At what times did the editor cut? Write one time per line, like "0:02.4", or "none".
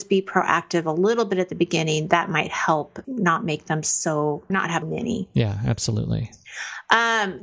0:03.0
0:04.5
0:04.8